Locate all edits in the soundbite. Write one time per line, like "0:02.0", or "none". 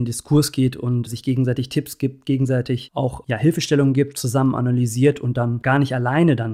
0:01.1

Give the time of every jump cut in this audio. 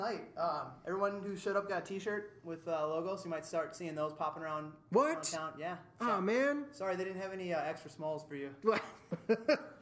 none

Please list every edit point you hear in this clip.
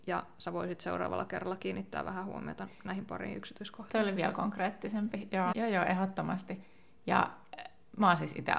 0:05.5

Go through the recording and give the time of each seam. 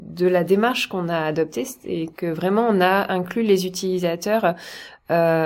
none

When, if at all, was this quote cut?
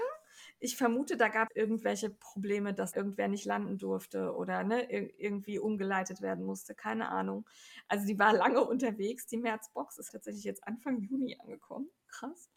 0:01.5
0:02.9
0:10.1

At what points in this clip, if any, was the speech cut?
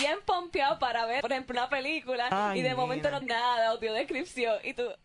0:01.2
0:03.2

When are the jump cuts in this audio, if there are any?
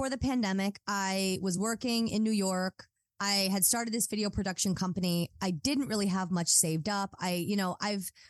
none

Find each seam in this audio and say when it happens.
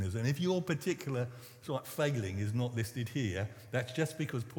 none

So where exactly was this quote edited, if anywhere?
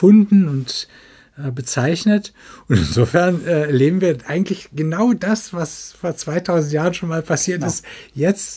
none

